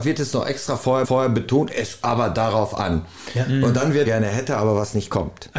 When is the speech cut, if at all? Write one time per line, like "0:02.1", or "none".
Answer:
0:01.0
0:02.0
0:04.1